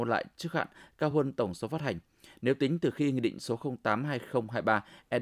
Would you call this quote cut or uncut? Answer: uncut